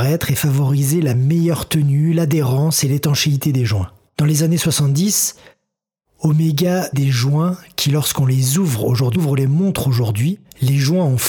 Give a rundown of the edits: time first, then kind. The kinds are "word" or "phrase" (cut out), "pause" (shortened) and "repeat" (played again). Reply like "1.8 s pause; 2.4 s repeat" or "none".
6.9 s word; 9.1 s word